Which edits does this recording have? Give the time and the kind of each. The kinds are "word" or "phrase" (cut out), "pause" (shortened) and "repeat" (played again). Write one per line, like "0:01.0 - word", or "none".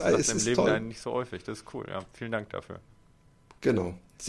none